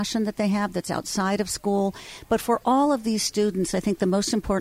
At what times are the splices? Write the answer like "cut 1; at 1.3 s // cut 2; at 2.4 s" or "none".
none